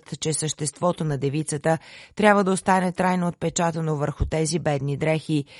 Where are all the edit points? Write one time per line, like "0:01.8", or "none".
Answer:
none